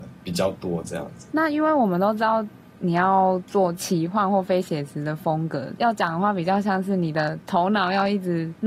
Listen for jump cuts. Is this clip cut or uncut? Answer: uncut